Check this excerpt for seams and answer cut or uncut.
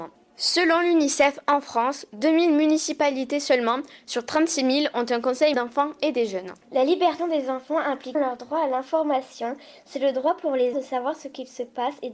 cut